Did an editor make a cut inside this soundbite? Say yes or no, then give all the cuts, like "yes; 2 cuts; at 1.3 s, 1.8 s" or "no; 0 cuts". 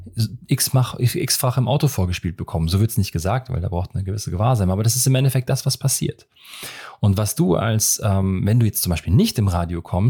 no; 0 cuts